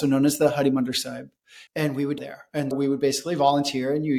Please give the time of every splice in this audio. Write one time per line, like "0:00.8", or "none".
0:01.7
0:02.2
0:02.7